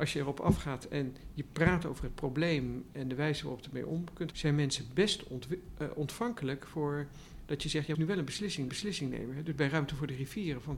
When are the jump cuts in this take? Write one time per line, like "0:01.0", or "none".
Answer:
0:04.3
0:07.9
0:08.7